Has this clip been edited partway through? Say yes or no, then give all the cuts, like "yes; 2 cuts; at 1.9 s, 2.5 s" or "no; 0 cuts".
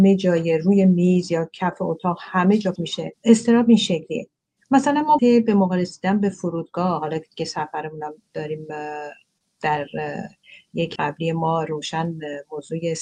yes; 4 cuts; at 2.8 s, 3.2 s, 5.2 s, 11.0 s